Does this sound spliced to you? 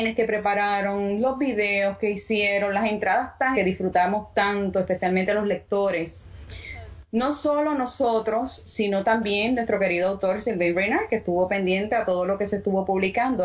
yes; 1 cut; at 3.5 s

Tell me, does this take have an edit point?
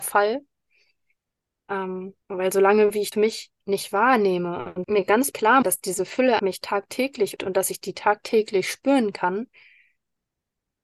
yes; 7 cuts; at 2.2 s, 3.1 s, 4.8 s, 5.3 s, 5.6 s, 6.4 s, 7.4 s

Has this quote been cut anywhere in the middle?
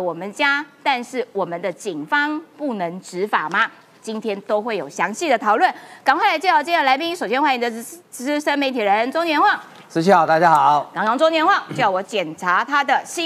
no; 0 cuts

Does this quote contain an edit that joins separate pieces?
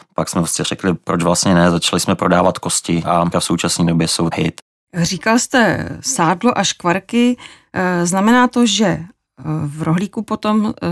yes; 2 cuts; at 3.3 s, 4.3 s

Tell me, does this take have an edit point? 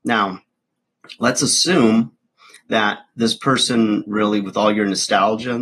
no; 0 cuts

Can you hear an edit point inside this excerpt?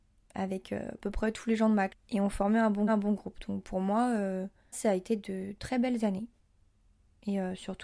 yes; 3 cuts; at 1.9 s, 2.9 s, 4.7 s

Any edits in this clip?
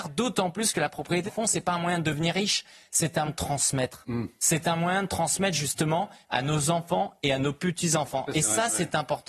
yes; 2 cuts; at 1.3 s, 3.3 s

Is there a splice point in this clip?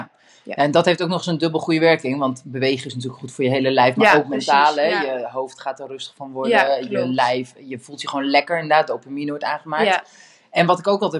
no; 0 cuts

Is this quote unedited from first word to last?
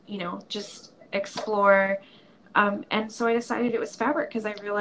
yes; 0 cuts

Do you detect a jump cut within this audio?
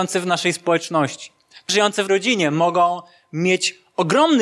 yes; 2 cuts; at 1.7 s, 2.1 s

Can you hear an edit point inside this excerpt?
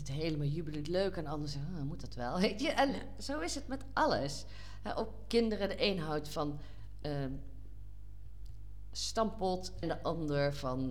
yes; 1 cut; at 9.8 s

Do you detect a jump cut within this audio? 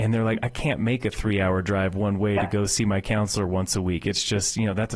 no; 0 cuts

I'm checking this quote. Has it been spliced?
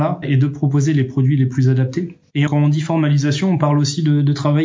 yes; 1 cut; at 2.5 s

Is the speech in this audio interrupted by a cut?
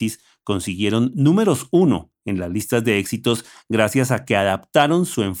no; 0 cuts

